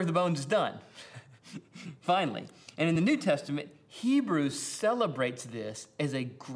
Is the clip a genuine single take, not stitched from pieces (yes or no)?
yes